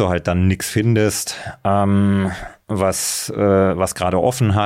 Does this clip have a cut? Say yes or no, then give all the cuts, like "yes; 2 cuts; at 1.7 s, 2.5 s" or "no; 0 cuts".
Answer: no; 0 cuts